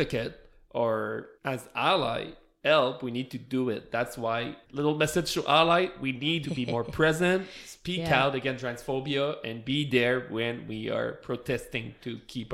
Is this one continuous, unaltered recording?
no; 4 cuts; at 1.4 s, 2.6 s, 4.6 s, 6.4 s

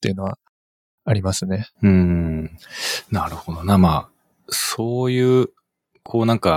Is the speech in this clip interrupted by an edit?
no; 0 cuts

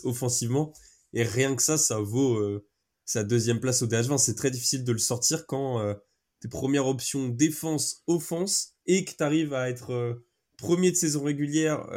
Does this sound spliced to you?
yes; 1 cut; at 8.8 s

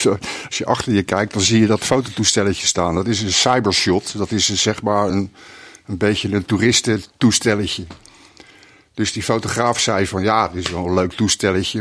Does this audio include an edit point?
no; 0 cuts

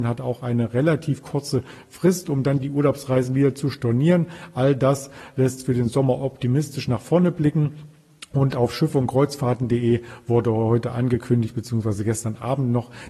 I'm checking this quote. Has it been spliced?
no; 0 cuts

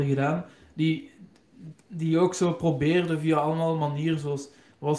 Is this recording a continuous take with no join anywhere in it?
yes; 0 cuts

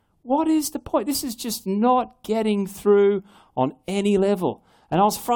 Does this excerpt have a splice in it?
no; 0 cuts

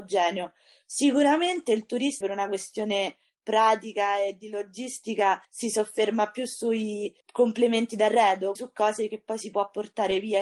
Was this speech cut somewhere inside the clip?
yes; 4 cuts; at 2.2 s, 5.4 s, 7.2 s, 8.6 s

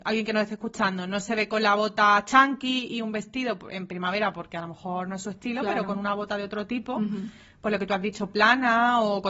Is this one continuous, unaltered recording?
yes; 0 cuts

